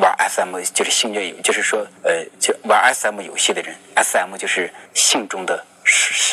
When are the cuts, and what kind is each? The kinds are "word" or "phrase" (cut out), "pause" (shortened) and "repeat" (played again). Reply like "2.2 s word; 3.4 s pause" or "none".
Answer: 2.0 s pause; 4.9 s pause